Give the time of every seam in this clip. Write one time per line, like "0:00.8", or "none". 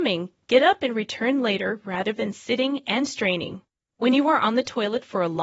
0:03.7